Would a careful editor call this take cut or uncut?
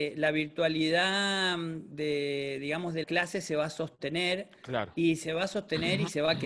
cut